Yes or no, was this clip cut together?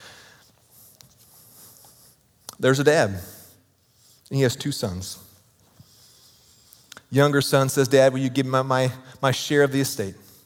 no